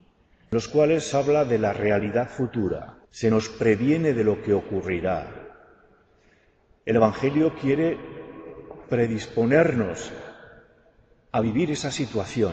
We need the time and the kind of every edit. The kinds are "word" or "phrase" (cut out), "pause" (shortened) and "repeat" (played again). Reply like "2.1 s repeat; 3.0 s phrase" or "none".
1.1 s word; 3.0 s pause